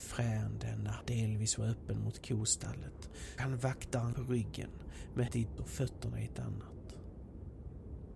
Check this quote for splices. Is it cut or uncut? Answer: cut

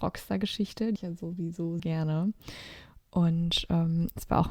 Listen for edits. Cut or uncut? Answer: cut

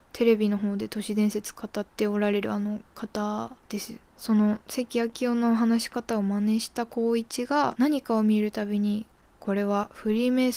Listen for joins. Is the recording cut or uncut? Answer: cut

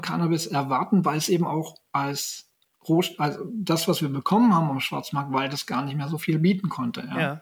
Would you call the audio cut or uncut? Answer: uncut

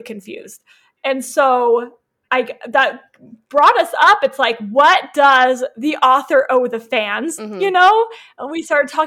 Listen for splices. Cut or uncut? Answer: uncut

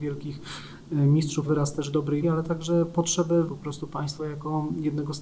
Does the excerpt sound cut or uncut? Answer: cut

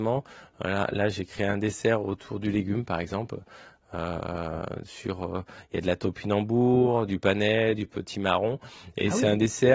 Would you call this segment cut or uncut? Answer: uncut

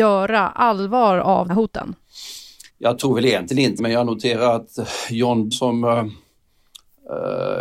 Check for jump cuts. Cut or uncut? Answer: cut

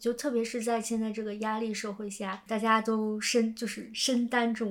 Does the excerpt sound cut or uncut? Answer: cut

